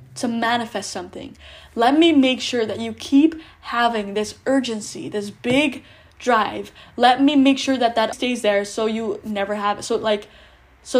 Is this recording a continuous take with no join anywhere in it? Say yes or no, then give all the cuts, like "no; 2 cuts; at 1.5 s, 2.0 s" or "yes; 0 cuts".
no; 1 cut; at 8.1 s